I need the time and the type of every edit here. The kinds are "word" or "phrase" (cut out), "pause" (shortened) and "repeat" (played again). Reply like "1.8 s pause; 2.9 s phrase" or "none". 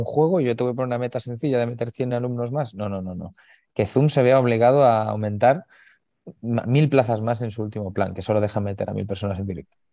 none